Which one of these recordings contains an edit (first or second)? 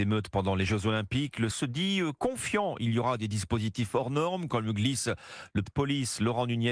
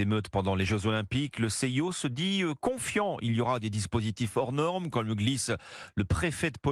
first